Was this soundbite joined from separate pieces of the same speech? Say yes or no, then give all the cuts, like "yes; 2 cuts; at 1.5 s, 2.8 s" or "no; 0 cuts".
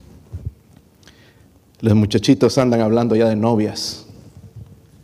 no; 0 cuts